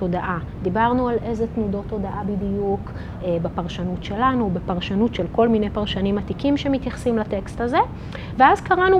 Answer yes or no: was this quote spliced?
no